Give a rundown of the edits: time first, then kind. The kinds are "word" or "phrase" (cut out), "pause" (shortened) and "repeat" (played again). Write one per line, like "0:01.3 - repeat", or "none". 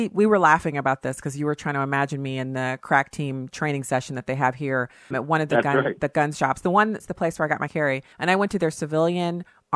0:05.1 - word
0:07.0 - word
0:07.7 - word
0:08.1 - pause